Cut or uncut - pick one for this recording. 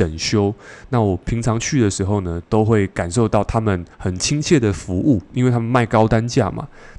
cut